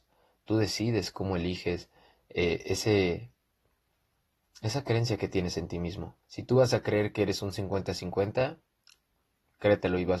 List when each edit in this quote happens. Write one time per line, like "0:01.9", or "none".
0:06.2